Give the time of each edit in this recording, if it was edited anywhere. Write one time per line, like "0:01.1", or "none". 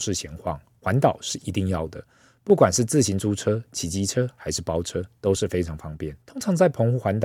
0:06.2

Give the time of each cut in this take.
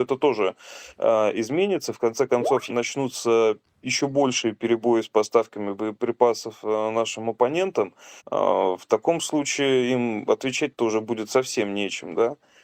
0:00.9
0:02.7
0:03.6
0:08.2

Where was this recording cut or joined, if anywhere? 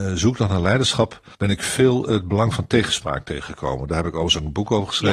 0:01.3

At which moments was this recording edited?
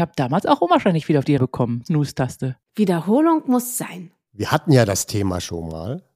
0:01.4
0:01.9

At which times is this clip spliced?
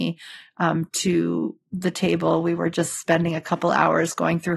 none

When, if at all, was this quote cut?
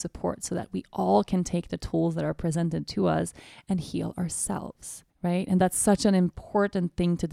0:05.1

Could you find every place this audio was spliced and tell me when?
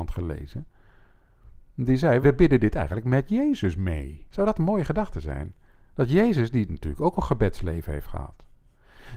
0:02.2
0:04.3

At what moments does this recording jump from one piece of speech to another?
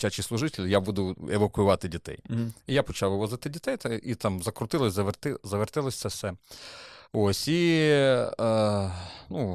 0:07.0

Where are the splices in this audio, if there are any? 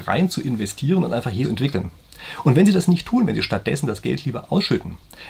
0:01.4

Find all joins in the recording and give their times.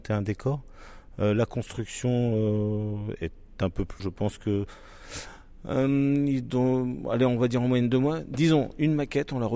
0:04.0

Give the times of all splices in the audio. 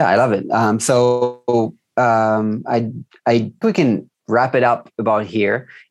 0:03.6

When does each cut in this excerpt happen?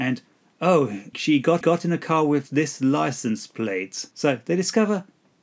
0:01.1
0:01.6
0:04.1

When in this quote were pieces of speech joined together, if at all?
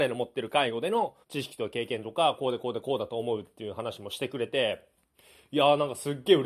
0:01.2

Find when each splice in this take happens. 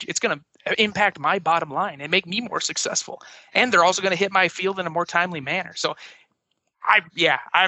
none

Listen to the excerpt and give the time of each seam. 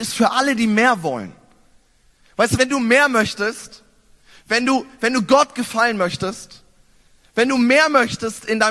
0:02.6

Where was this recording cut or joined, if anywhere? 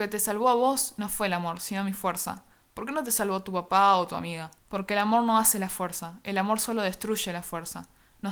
0:04.6

